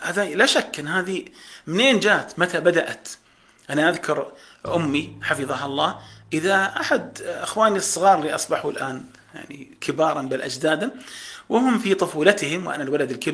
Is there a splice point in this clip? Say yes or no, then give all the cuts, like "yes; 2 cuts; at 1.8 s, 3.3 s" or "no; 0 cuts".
no; 0 cuts